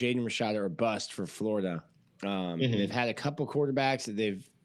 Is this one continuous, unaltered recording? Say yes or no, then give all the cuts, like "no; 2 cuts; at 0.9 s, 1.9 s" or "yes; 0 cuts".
yes; 0 cuts